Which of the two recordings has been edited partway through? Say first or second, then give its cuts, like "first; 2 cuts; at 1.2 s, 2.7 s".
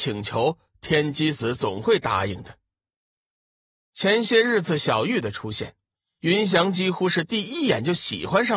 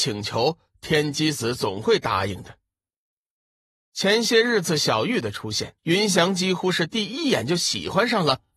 second; 1 cut; at 5.8 s